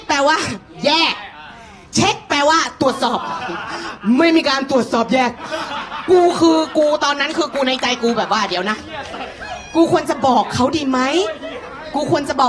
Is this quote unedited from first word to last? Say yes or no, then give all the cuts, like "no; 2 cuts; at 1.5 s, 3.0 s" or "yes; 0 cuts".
yes; 0 cuts